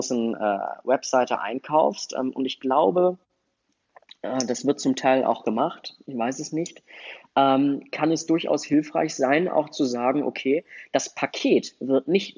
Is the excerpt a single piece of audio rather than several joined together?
yes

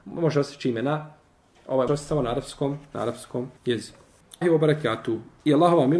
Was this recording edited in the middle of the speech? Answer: yes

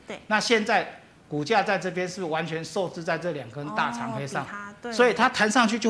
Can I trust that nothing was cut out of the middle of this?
yes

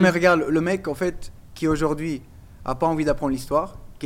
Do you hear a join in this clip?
no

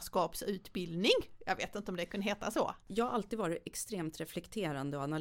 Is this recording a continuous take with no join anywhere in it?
no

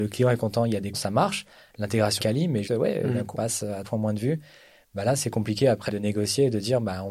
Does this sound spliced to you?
yes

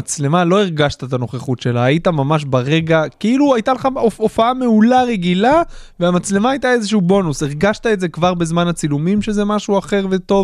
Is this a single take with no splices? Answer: yes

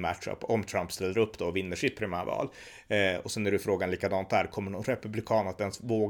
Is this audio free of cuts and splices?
yes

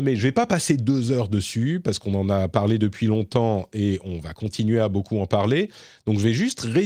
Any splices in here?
no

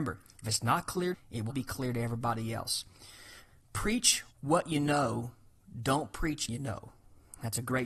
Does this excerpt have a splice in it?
yes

